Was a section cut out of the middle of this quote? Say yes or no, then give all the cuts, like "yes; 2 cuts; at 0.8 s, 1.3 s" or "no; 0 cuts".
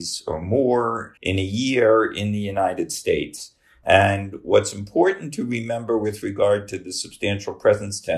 yes; 1 cut; at 1.2 s